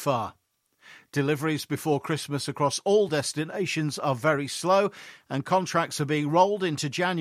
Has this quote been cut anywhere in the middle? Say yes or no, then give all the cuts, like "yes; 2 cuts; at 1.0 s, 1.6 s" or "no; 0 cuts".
no; 0 cuts